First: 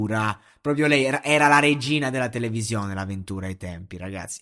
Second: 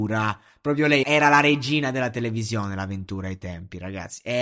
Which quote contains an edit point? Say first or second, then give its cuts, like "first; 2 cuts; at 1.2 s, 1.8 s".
second; 1 cut; at 1.0 s